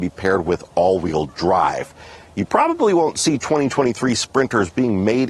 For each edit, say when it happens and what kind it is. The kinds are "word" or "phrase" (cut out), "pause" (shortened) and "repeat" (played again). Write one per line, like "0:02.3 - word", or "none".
none